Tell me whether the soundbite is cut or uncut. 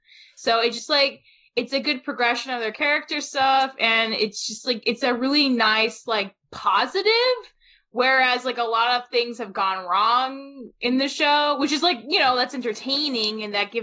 uncut